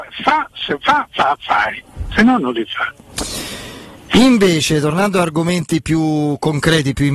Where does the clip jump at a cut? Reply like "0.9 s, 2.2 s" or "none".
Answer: 4.0 s